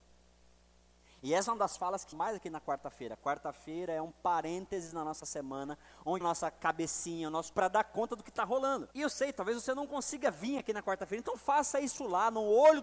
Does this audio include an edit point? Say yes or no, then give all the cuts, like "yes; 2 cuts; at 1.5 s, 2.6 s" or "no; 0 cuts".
yes; 4 cuts; at 2.1 s, 6.2 s, 7.5 s, 8.9 s